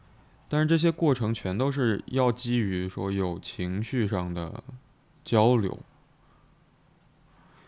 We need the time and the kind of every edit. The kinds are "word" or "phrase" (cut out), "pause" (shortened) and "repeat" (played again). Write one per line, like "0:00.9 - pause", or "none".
none